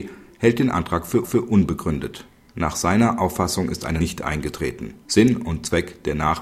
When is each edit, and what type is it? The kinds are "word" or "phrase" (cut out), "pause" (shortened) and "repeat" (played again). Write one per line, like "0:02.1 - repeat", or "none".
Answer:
0:01.2 - repeat
0:04.0 - word
0:05.0 - pause